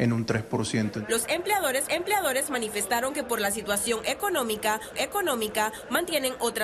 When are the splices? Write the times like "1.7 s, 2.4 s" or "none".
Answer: 1.9 s, 4.9 s